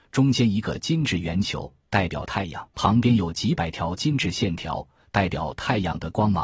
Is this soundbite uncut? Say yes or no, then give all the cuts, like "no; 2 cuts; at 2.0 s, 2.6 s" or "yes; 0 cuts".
no; 1 cut; at 2.7 s